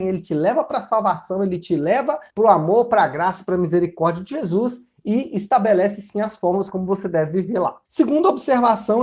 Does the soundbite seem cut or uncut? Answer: cut